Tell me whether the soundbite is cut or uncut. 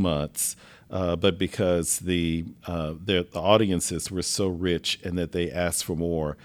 uncut